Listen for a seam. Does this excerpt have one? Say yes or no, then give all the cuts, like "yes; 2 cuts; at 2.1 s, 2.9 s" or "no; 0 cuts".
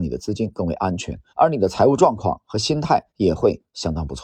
yes; 2 cuts; at 1.3 s, 3.1 s